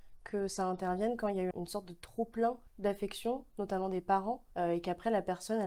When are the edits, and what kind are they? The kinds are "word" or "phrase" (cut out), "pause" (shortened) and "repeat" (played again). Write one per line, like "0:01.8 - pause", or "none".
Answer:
0:01.5 - word
0:02.7 - pause
0:04.5 - pause